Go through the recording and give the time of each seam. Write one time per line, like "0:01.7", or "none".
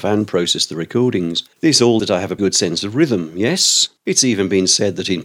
0:01.5
0:02.0
0:02.4
0:04.0